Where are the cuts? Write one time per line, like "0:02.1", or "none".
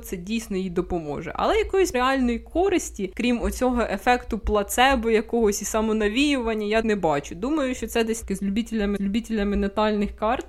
0:01.9
0:06.8
0:08.2
0:09.0